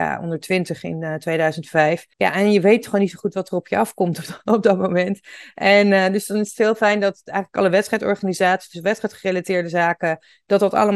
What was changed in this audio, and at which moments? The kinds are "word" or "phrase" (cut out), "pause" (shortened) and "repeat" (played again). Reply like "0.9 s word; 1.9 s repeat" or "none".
2.1 s pause